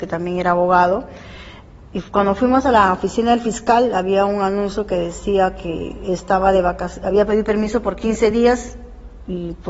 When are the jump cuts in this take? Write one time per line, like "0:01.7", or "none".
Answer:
none